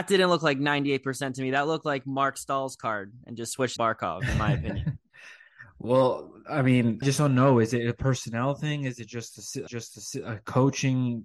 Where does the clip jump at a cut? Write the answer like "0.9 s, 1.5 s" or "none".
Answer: 3.8 s, 5.1 s, 7.0 s, 9.7 s